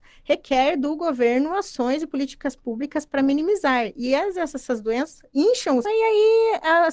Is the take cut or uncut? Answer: cut